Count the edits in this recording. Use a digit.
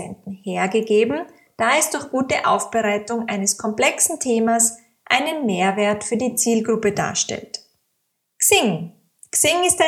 0